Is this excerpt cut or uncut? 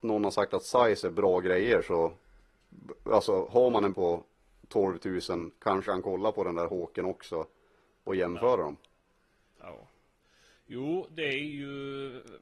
cut